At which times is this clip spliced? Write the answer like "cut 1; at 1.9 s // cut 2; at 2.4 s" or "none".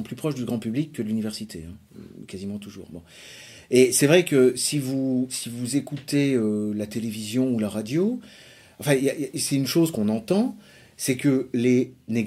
none